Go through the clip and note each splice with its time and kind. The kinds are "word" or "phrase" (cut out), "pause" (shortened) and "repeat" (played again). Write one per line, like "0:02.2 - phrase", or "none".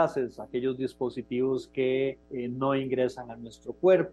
0:02.2 - pause